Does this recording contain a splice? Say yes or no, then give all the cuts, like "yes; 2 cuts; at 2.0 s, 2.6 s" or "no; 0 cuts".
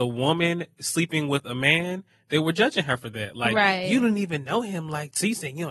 no; 0 cuts